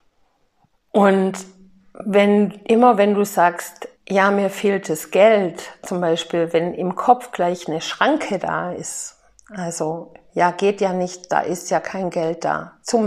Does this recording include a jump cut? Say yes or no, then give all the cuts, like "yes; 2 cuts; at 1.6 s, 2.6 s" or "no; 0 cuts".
yes; 1 cut; at 4.0 s